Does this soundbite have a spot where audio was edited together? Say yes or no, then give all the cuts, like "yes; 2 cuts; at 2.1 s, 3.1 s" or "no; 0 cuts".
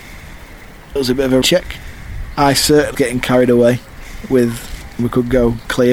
yes; 4 cuts; at 1.0 s, 1.4 s, 2.9 s, 5.0 s